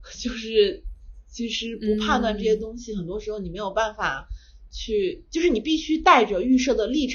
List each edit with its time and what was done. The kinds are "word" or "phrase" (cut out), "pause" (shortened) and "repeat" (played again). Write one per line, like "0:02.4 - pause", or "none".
none